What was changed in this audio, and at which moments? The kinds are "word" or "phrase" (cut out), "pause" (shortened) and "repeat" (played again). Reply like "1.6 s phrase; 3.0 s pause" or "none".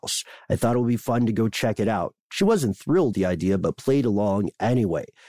3.1 s word